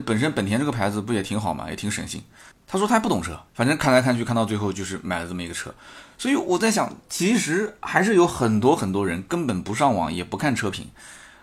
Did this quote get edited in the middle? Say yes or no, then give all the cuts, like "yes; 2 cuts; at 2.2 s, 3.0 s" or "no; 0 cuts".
yes; 2 cuts; at 2.5 s, 3.5 s